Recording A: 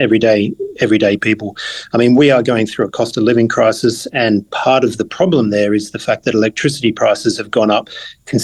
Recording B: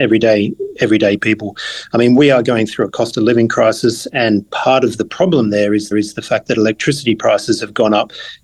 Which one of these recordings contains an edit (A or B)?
B